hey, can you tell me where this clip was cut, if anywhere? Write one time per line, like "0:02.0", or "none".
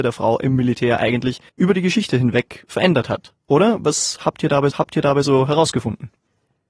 0:01.5
0:04.7